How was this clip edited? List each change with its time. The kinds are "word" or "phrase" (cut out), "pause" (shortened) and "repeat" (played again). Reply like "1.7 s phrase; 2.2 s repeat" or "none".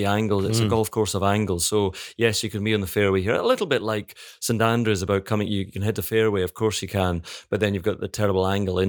none